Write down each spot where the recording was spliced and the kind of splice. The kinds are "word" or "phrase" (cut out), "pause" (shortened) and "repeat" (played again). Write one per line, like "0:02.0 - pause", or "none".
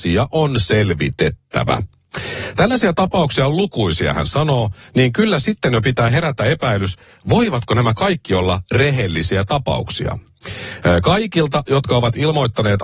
none